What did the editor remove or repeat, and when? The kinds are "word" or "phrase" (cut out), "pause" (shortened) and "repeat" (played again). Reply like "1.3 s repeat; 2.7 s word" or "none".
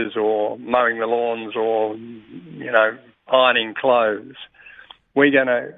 none